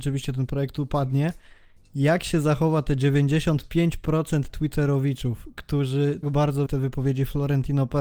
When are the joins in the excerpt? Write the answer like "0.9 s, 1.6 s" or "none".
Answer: 6.2 s, 6.7 s